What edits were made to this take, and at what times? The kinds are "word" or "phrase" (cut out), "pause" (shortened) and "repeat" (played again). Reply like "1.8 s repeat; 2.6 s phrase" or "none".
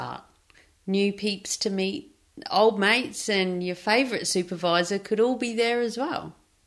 none

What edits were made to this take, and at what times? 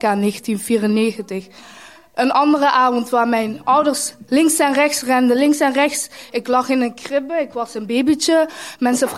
none

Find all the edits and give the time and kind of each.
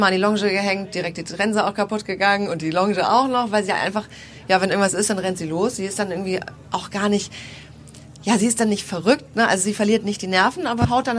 none

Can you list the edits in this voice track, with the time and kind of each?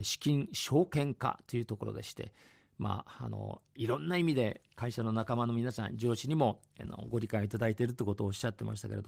none

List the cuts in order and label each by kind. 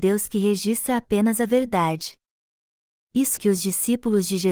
3.4 s word

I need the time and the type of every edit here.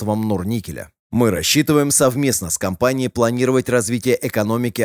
none

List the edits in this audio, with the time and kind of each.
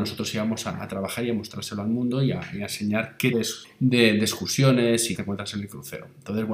3.3 s word; 3.6 s word; 5.2 s word

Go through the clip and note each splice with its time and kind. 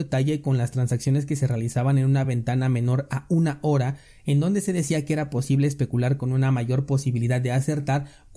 none

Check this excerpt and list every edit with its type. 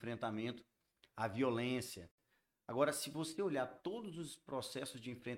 none

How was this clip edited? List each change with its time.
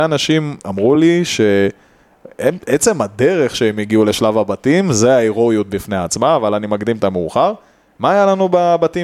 none

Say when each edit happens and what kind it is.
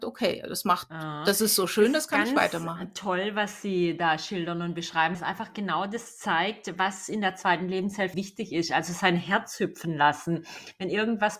5.1 s word; 8.1 s word

